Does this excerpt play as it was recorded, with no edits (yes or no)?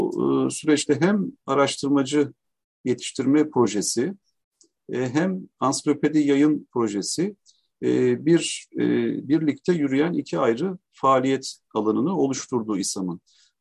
yes